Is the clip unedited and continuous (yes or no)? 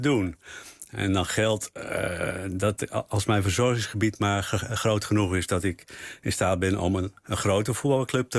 yes